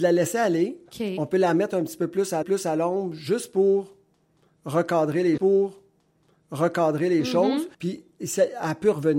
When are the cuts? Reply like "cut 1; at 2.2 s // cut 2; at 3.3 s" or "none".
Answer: cut 1; at 2.4 s // cut 2; at 5.4 s // cut 3; at 7.7 s